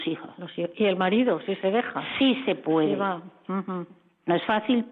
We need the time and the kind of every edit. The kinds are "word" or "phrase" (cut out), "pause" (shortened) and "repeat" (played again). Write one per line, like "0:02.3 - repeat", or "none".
none

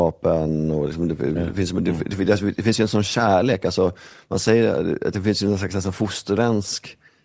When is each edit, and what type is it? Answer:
none

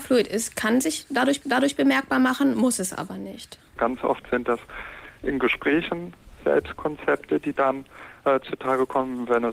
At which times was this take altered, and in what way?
0:01.4 - repeat

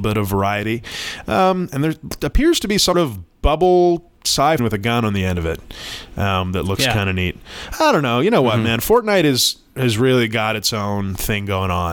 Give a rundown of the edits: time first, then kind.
0:02.9 - word
0:04.6 - phrase

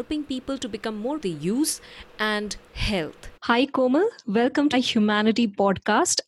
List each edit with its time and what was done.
0:01.2 - phrase
0:03.4 - pause
0:04.7 - word

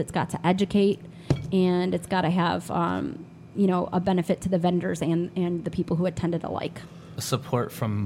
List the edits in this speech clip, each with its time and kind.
none

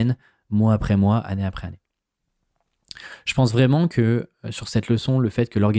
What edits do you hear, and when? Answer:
none

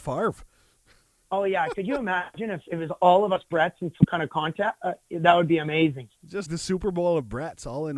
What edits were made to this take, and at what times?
0:06.5 - word

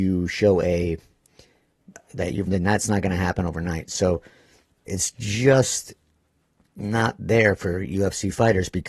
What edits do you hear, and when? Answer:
0:02.5 - word
0:04.9 - word

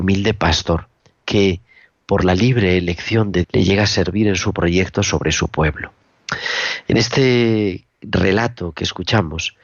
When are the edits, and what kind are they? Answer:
0:03.4 - word

